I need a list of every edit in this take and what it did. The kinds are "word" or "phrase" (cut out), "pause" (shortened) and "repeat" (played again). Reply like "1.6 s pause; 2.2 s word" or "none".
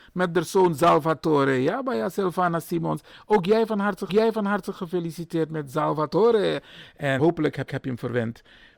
4.1 s repeat; 7.2 s word; 7.7 s repeat